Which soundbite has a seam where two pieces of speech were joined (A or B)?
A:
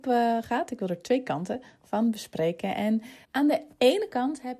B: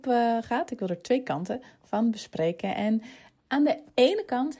A